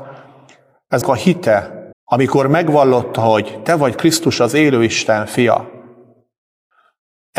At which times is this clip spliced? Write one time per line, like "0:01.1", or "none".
0:01.0
0:01.9